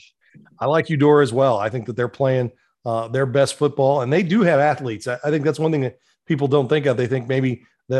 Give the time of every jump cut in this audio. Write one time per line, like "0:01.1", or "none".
none